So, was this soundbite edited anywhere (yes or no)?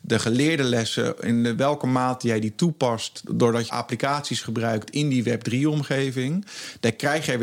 yes